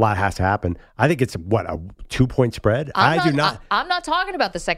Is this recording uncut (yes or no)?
yes